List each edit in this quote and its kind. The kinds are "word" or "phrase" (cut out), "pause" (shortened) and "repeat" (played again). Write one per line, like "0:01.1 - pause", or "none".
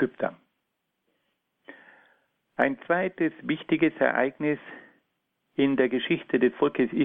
none